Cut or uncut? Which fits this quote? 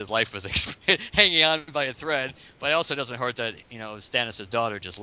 uncut